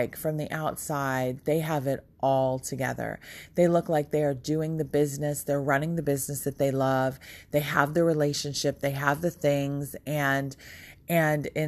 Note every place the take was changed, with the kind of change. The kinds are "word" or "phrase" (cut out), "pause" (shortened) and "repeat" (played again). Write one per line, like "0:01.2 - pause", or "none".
none